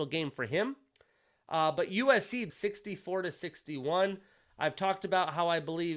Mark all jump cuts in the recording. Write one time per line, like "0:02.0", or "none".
0:02.5